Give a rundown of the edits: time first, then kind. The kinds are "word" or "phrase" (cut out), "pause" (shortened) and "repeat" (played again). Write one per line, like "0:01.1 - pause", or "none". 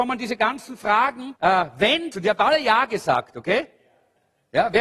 0:01.4 - pause
0:02.1 - phrase